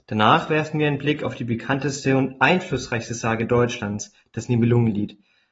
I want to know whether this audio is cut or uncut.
uncut